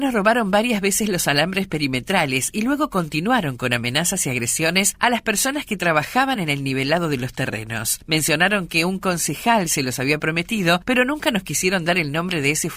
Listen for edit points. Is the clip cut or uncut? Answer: uncut